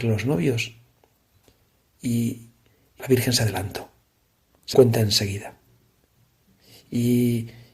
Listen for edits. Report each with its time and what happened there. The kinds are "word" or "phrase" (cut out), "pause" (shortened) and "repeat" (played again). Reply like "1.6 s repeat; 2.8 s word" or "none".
3.0 s word; 4.7 s word